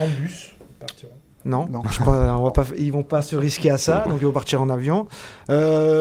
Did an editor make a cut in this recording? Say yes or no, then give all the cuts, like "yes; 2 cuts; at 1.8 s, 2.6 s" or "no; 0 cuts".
no; 0 cuts